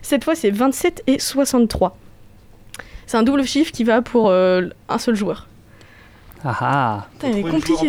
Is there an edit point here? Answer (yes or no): no